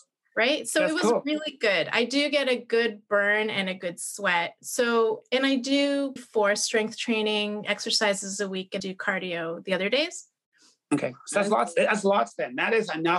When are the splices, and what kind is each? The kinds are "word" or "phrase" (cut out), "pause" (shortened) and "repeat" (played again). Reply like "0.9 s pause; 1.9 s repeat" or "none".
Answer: 6.2 s word; 8.8 s word